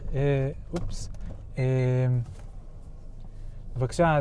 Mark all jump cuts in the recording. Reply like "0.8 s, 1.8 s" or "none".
none